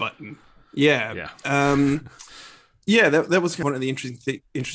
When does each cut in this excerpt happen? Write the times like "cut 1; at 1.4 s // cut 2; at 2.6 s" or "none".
cut 1; at 3.6 s